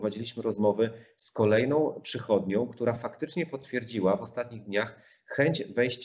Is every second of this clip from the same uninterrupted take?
yes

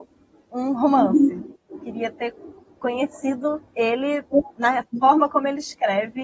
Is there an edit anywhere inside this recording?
yes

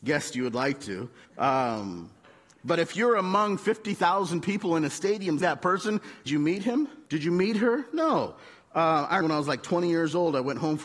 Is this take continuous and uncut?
no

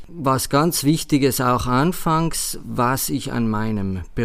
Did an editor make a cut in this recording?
no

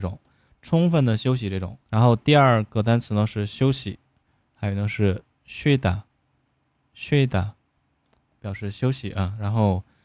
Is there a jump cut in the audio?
yes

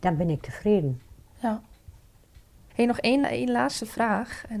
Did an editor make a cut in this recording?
yes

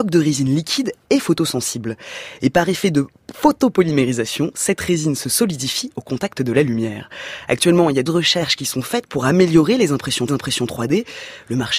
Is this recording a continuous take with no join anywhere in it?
no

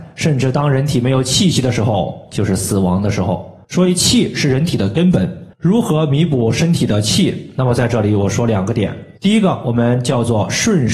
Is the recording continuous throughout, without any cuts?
no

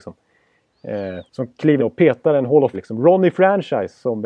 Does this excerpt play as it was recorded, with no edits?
no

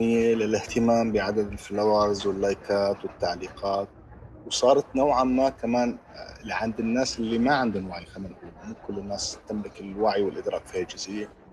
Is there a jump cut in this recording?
no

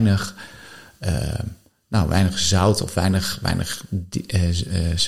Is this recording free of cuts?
yes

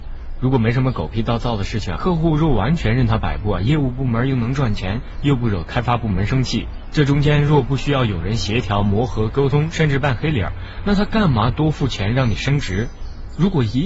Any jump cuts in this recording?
yes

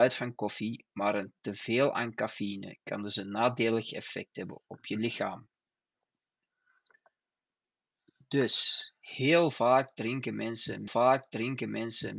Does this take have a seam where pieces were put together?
yes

